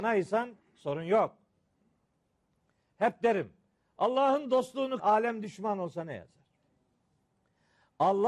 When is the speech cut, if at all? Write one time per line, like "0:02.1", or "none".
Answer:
0:05.0